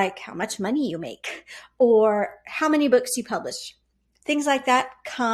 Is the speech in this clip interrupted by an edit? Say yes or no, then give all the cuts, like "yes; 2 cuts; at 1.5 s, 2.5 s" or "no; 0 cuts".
no; 0 cuts